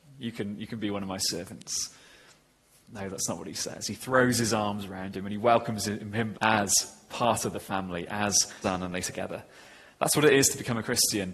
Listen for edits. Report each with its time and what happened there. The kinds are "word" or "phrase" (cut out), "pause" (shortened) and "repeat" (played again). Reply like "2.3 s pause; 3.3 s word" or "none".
6.3 s word; 8.6 s word; 9.0 s word